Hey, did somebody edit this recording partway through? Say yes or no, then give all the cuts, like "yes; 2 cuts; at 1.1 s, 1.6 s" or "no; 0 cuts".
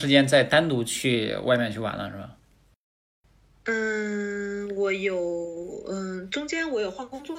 no; 0 cuts